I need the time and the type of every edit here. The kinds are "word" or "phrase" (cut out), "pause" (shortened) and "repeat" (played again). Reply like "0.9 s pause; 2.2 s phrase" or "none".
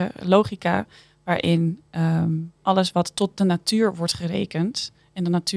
2.6 s pause